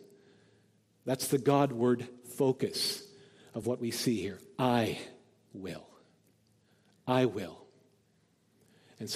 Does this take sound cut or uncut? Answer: uncut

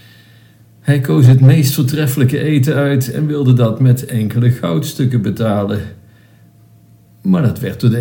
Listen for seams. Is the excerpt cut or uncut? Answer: uncut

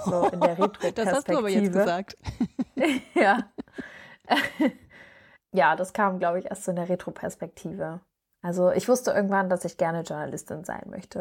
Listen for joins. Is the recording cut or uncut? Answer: uncut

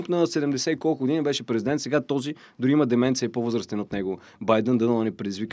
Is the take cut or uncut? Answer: uncut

